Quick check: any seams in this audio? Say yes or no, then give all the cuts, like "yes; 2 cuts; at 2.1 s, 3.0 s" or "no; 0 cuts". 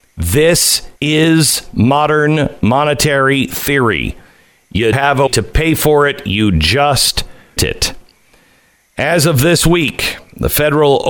yes; 4 cuts; at 1.0 s, 4.9 s, 5.3 s, 7.6 s